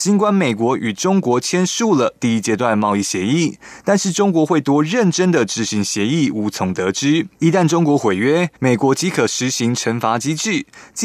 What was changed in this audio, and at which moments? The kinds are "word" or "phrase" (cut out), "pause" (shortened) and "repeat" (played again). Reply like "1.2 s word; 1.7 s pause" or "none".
7.3 s pause; 8.5 s pause